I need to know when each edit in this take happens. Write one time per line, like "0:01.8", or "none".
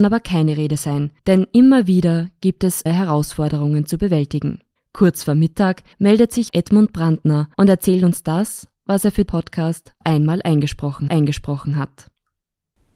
0:01.2
0:02.9
0:04.8
0:05.9
0:06.5
0:07.5
0:09.3
0:10.0
0:11.1